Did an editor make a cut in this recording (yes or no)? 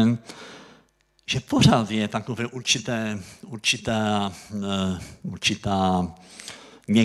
no